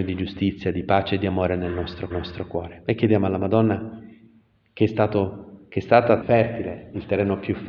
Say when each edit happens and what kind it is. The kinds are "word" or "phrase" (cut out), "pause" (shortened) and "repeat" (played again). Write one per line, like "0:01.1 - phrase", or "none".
0:02.1 - repeat
0:06.2 - word